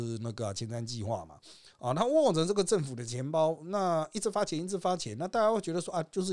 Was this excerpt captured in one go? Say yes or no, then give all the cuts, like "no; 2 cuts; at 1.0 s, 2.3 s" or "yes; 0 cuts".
yes; 0 cuts